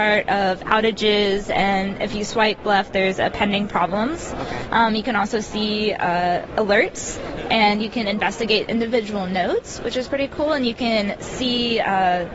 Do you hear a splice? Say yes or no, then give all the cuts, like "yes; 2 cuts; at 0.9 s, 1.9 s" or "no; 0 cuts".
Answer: no; 0 cuts